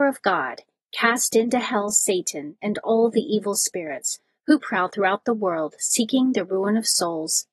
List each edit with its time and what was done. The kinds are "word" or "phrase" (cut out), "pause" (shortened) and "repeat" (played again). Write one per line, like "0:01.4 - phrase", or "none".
none